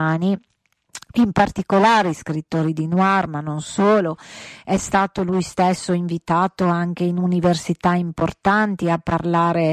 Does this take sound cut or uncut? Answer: uncut